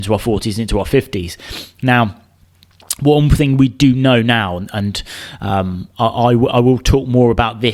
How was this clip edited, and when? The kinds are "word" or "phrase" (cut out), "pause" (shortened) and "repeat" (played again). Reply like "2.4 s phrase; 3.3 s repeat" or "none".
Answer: none